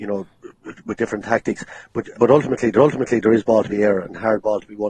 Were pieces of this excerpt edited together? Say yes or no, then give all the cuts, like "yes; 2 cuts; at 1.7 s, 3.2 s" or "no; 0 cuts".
yes; 3 cuts; at 2.1 s, 2.8 s, 3.7 s